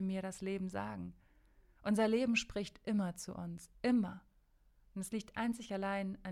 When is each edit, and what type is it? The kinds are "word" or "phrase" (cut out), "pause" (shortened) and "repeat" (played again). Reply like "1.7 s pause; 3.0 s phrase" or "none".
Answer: none